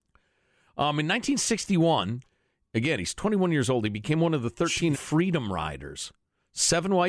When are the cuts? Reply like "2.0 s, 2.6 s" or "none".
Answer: 4.9 s